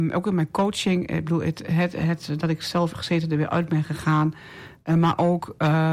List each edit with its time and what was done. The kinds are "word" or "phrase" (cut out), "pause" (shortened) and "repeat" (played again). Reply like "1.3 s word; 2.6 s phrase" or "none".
2.9 s phrase